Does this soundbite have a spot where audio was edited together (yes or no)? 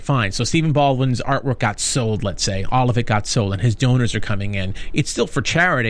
no